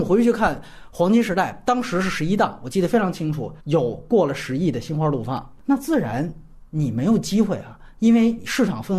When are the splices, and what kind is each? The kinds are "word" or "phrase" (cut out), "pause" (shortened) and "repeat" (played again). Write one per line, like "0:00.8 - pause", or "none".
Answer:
0:03.6 - pause